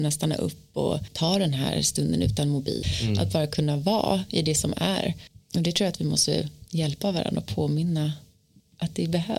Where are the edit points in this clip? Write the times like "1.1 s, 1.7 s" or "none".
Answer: none

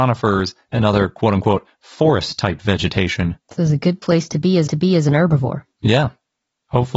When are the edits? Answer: 3.4 s, 4.7 s, 5.7 s

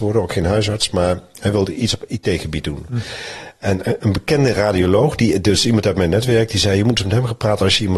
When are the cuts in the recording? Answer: none

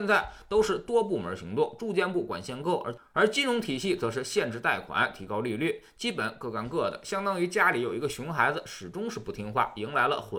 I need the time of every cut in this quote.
none

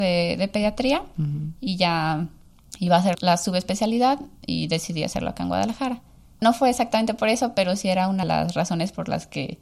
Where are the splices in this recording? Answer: 3.1 s, 6.4 s, 8.2 s

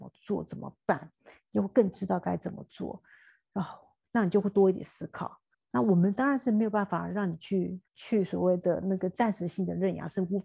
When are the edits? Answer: 5.5 s, 7.9 s

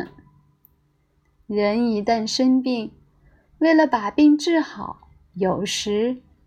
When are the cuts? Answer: none

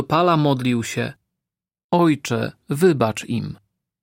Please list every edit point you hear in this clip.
none

